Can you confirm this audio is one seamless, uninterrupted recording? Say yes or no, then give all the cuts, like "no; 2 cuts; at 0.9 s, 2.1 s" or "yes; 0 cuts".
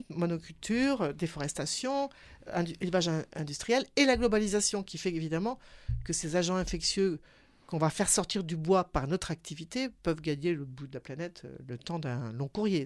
yes; 0 cuts